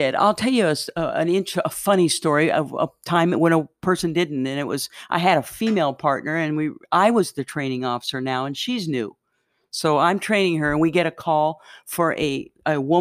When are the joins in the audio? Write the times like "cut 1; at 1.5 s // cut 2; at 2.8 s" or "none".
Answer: none